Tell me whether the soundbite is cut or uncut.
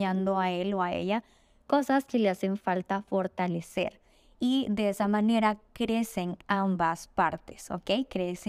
uncut